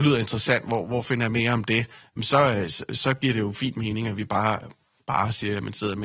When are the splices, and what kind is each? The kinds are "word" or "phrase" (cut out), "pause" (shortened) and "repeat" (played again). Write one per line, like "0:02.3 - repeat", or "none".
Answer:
none